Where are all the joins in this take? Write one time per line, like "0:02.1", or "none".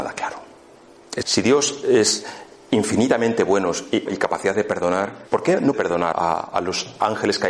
0:01.2
0:04.1
0:05.3
0:05.7
0:06.1